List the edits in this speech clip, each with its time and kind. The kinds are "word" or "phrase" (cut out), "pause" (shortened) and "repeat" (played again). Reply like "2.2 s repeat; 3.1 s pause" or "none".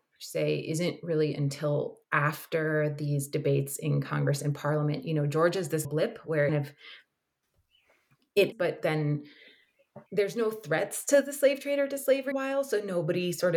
2.0 s pause; 5.8 s word; 6.5 s phrase; 8.5 s word; 10.1 s pause; 12.3 s phrase

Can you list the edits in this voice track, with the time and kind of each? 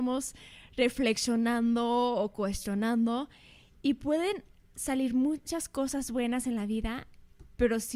none

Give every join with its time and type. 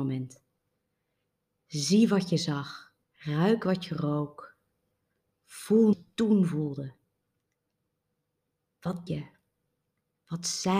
3.0 s pause; 5.9 s phrase; 9.1 s word

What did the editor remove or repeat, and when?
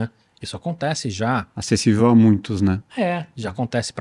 none

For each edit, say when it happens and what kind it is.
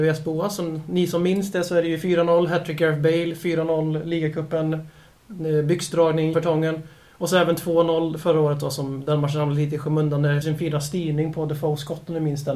6.3 s word; 10.4 s phrase

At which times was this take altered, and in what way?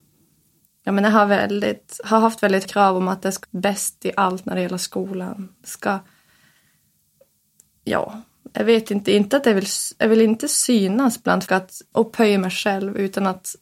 2.6 s word; 3.4 s word; 11.5 s word; 11.9 s word

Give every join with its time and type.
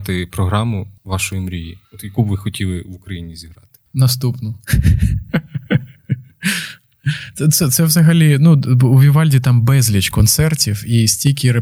1.0 s pause; 1.8 s pause; 3.9 s pause

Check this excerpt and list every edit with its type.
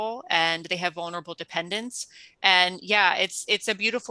none

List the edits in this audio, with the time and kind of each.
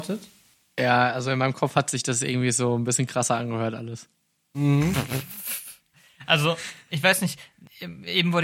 none

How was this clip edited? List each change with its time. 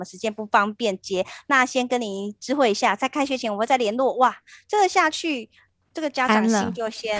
none

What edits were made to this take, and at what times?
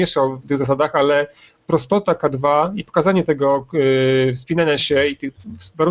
none

